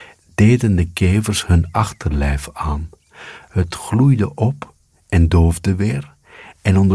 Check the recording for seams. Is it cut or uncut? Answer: uncut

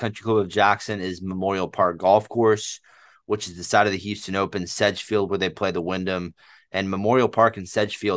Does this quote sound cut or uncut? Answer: uncut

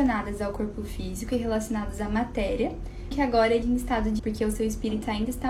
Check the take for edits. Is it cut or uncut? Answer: cut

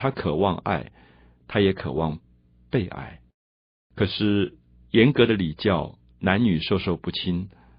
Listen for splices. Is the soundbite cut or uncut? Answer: uncut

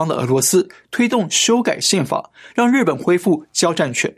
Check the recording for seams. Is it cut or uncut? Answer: uncut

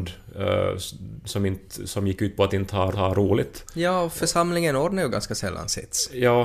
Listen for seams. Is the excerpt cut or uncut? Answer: cut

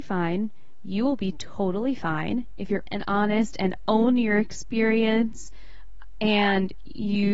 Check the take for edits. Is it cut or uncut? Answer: cut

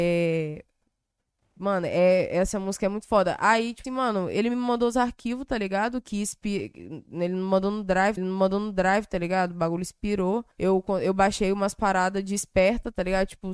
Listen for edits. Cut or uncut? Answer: cut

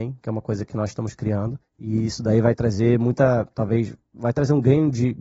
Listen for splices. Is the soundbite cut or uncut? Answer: cut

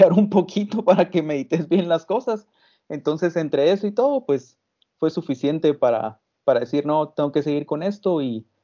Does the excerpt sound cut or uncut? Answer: uncut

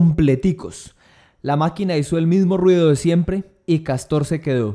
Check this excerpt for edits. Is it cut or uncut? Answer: uncut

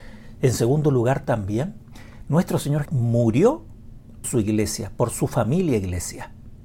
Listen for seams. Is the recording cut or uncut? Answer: cut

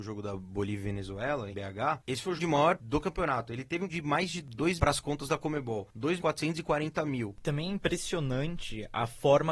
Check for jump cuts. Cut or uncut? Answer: cut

